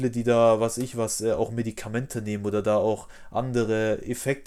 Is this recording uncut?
yes; 0 cuts

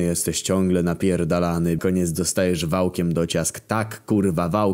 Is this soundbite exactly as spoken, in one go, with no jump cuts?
no; 1 cut; at 1.8 s

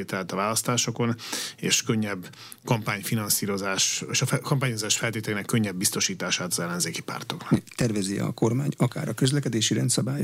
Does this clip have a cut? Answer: no; 0 cuts

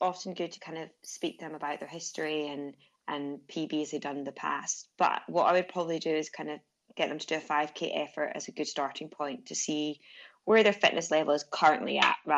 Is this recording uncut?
yes; 0 cuts

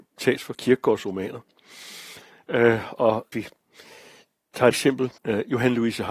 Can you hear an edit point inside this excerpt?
yes; 3 cuts; at 3.3 s, 4.7 s, 5.2 s

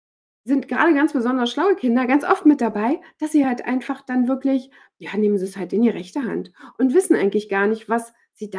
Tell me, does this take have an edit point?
no; 0 cuts

